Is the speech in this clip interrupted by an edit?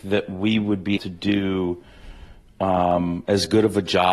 yes; 1 cut; at 1.0 s

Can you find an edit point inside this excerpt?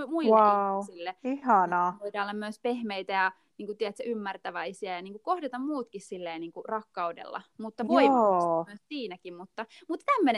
no; 0 cuts

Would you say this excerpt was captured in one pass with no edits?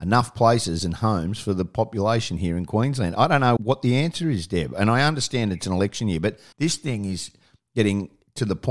no; 2 cuts; at 3.6 s, 6.5 s

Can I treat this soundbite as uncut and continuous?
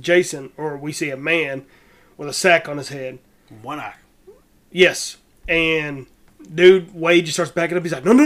yes; 0 cuts

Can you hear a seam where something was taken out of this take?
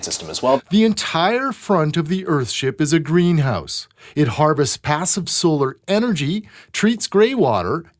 no; 0 cuts

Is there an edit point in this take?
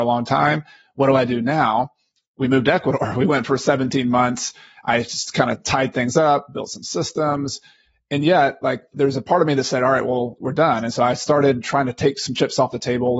no; 0 cuts

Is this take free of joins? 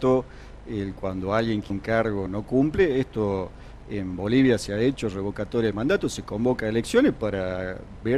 no; 2 cuts; at 1.7 s, 2.3 s

